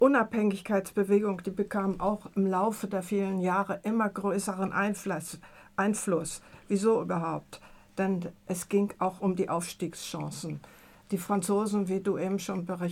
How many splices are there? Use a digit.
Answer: 0